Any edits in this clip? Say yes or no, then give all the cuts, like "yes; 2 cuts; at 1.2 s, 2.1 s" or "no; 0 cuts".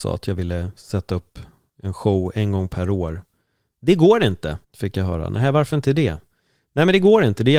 yes; 1 cut; at 4.6 s